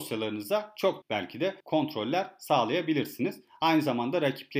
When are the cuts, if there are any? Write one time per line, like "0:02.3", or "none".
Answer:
0:01.0
0:01.6